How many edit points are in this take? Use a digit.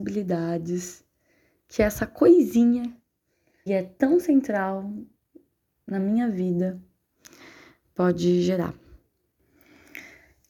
1